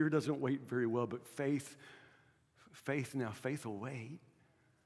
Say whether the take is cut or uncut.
uncut